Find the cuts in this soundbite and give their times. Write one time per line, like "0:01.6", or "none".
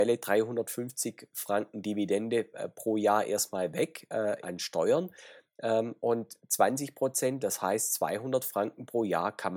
0:04.4